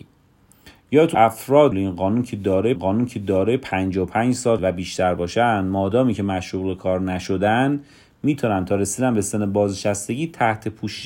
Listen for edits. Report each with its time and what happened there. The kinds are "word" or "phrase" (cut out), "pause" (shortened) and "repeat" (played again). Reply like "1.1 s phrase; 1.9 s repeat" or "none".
1.1 s word; 1.7 s phrase; 2.8 s repeat; 4.6 s word